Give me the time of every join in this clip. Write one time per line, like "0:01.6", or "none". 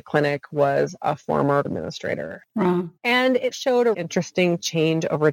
0:01.6
0:03.0
0:03.5
0:03.9